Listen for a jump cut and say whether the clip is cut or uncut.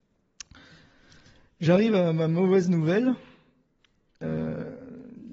uncut